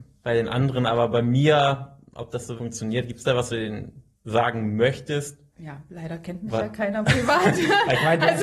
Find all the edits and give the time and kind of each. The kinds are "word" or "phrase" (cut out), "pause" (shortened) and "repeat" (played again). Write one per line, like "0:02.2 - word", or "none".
0:02.6 - word
0:03.5 - word
0:04.1 - pause
0:05.5 - pause